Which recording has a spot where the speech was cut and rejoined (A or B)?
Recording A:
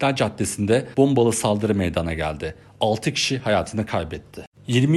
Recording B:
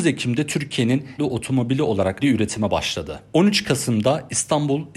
B